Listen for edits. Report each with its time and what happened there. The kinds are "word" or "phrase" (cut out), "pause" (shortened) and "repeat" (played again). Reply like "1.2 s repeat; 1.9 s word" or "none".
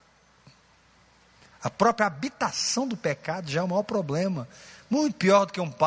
none